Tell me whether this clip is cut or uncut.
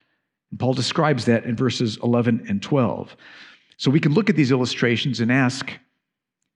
uncut